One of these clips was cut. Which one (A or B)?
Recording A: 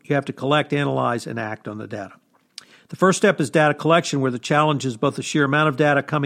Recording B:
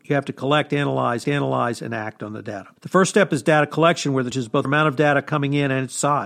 B